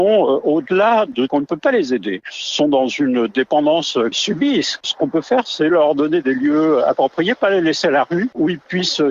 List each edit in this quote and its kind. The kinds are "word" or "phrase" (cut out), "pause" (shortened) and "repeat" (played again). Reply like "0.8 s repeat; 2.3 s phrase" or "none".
1.3 s phrase; 4.1 s word